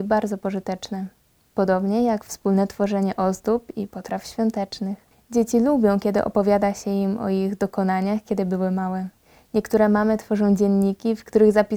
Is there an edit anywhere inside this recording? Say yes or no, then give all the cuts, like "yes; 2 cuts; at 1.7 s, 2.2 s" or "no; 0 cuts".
no; 0 cuts